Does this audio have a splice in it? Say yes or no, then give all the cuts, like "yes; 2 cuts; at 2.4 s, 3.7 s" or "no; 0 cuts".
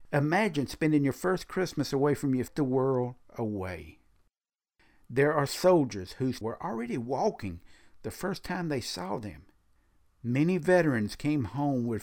yes; 4 cuts; at 2.5 s, 3.2 s, 5.5 s, 6.4 s